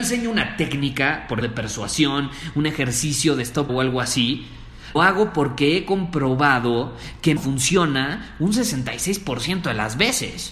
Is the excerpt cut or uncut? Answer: cut